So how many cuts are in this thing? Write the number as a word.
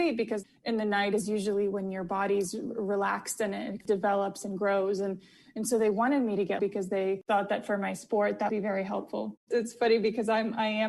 two